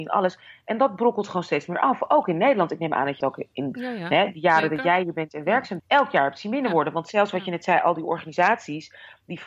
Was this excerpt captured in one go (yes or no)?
no